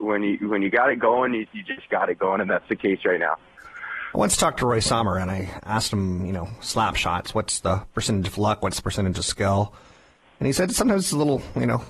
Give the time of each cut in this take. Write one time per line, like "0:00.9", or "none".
0:01.5